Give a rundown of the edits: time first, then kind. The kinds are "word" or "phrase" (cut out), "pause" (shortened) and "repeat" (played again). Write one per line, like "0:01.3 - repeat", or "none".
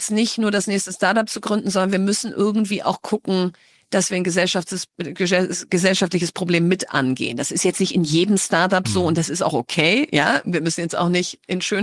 none